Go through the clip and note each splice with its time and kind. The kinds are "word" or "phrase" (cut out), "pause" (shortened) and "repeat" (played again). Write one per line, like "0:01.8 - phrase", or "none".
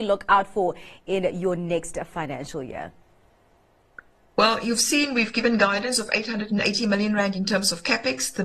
none